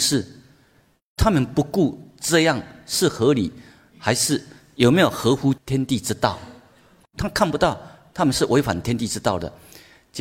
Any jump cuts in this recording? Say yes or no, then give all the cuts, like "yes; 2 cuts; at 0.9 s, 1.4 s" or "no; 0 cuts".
no; 0 cuts